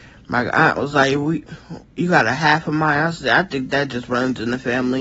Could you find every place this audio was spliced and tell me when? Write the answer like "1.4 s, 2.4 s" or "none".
none

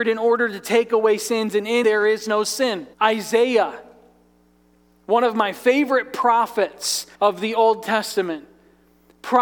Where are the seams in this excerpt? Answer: 1.8 s, 2.9 s, 7.1 s

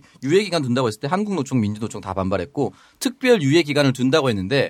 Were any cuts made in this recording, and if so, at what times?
none

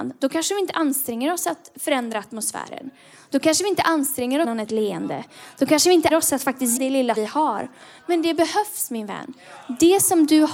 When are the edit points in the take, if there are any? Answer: 4.4 s, 6.1 s, 6.8 s, 7.1 s

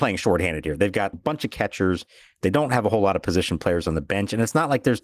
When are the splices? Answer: 1.1 s

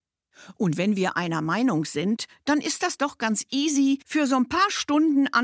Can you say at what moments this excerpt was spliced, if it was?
4.0 s

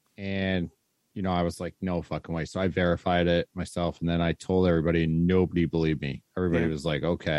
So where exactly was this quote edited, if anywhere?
none

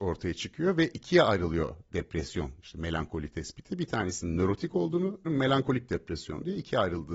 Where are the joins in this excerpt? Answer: 5.3 s

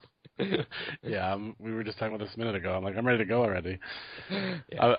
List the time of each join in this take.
none

